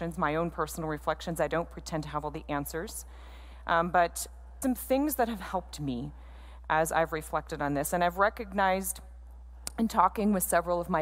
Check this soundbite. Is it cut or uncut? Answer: cut